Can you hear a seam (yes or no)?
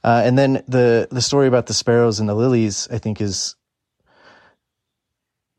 no